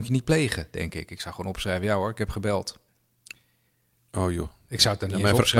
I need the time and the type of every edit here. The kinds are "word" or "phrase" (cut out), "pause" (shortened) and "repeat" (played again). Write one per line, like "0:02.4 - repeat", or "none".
none